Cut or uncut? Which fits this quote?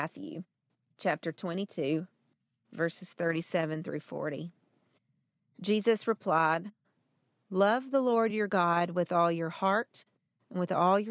uncut